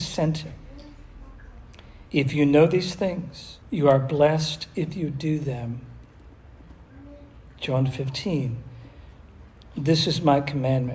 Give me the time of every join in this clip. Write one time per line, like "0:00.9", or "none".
0:02.1
0:03.6